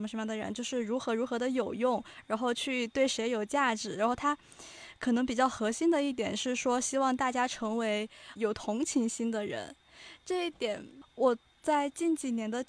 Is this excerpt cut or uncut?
cut